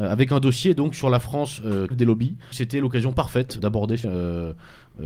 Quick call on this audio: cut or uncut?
cut